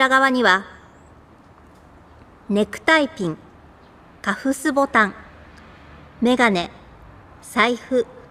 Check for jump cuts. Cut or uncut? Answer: uncut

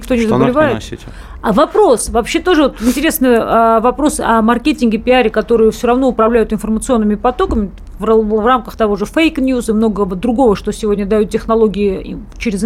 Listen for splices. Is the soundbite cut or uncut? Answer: uncut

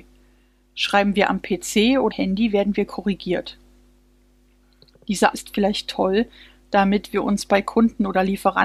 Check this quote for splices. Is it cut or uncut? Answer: cut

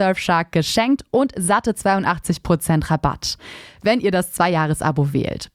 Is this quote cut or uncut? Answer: uncut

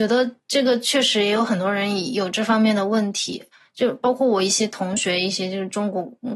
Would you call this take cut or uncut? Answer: uncut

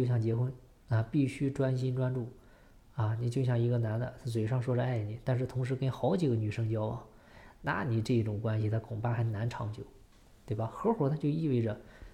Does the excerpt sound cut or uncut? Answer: uncut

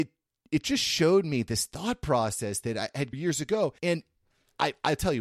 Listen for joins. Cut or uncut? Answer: cut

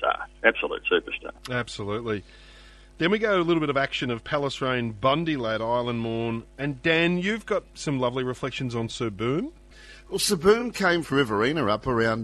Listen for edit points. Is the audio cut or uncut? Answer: cut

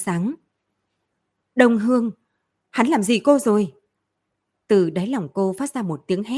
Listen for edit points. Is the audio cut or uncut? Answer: uncut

